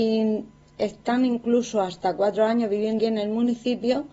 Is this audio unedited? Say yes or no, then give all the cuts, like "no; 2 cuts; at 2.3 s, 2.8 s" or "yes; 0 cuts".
no; 1 cut; at 3.0 s